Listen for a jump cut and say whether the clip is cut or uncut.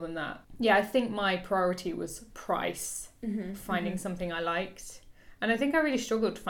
uncut